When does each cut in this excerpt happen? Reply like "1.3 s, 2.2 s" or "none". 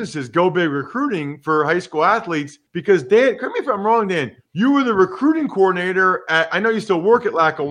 2.7 s, 4.4 s